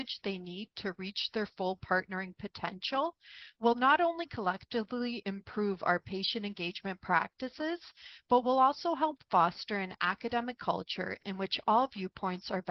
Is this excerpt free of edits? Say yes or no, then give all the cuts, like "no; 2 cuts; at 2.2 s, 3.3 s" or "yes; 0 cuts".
yes; 0 cuts